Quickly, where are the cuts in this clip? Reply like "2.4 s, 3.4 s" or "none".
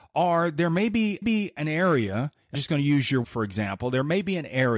1.2 s, 2.5 s, 3.2 s